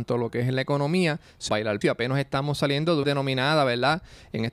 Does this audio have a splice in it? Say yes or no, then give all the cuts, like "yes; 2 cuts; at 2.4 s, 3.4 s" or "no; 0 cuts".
yes; 3 cuts; at 1.5 s, 1.8 s, 3.0 s